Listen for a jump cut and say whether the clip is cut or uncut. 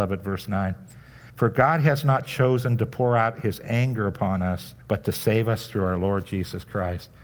cut